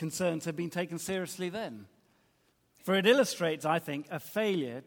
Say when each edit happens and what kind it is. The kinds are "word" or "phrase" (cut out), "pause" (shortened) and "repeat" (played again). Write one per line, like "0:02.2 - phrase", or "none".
0:02.4 - pause

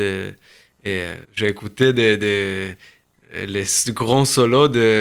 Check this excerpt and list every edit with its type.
0:01.2 - pause

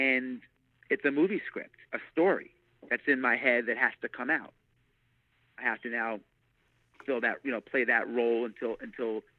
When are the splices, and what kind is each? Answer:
0:01.8 - pause

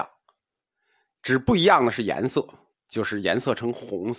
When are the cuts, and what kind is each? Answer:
none

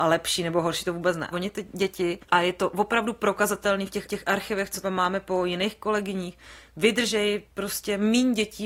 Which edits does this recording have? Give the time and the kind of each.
0:01.3 - word
0:02.2 - pause
0:04.1 - repeat
0:04.8 - phrase

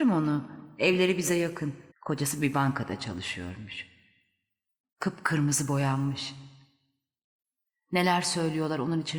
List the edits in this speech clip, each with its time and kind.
0:01.9 - pause

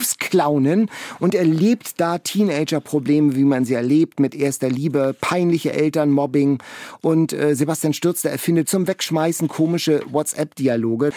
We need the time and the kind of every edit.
0:08.6 - word

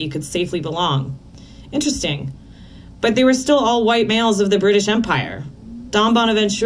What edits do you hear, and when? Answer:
none

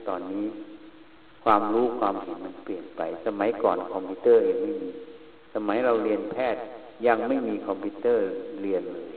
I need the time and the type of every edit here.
none

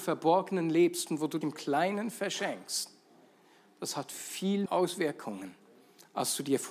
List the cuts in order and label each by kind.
0:01.4 - word
0:04.6 - word

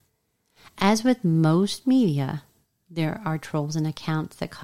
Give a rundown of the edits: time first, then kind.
none

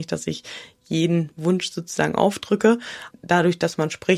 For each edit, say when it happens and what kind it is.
0:01.3 - word
0:03.1 - word

